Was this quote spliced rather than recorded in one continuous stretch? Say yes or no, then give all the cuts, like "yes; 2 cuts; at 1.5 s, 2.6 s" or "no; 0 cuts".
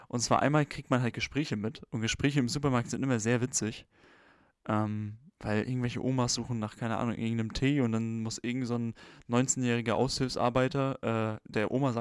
no; 0 cuts